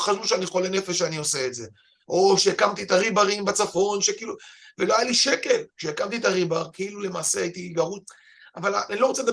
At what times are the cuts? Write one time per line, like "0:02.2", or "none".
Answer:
none